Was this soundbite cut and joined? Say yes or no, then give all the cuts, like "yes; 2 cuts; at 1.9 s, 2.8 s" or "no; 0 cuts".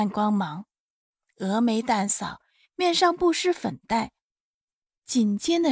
no; 0 cuts